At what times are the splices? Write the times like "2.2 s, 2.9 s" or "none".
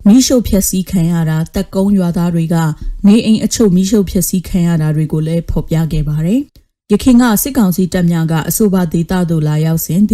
6.5 s